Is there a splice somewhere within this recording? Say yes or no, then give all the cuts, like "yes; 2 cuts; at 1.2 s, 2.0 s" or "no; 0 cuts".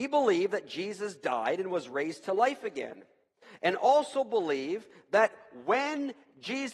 no; 0 cuts